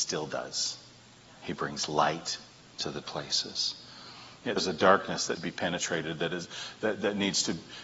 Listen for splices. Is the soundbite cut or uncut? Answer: cut